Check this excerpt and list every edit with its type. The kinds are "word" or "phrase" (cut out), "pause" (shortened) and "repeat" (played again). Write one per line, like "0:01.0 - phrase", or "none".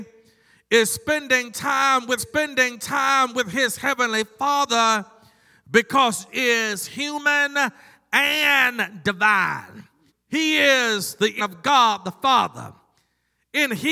0:02.2 - repeat
0:06.3 - word
0:10.1 - pause
0:11.4 - word